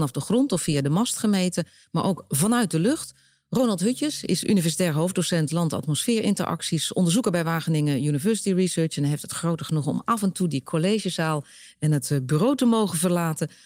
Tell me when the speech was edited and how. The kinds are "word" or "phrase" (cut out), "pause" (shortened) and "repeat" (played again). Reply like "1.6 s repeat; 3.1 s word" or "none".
none

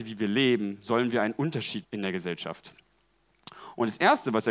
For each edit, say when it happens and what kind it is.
1.8 s word

